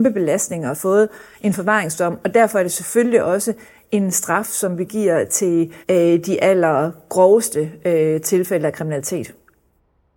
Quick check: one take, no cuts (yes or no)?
no